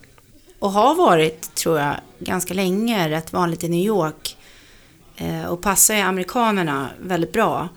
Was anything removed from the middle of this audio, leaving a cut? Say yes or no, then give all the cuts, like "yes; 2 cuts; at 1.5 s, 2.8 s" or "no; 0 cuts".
no; 0 cuts